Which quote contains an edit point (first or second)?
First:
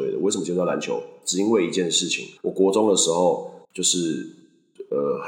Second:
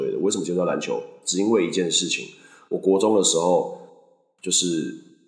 first